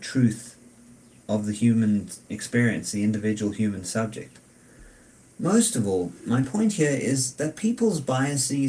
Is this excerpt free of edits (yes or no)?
yes